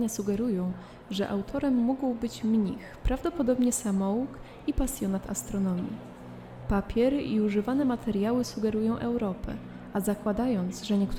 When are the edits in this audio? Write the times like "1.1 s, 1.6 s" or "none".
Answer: none